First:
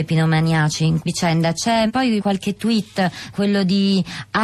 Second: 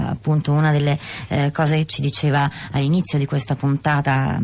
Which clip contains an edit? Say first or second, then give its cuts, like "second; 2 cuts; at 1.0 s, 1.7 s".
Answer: first; 4 cuts; at 1.0 s, 1.9 s, 2.2 s, 3.3 s